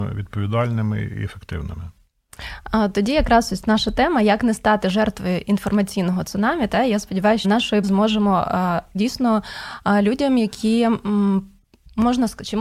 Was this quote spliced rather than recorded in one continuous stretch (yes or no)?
yes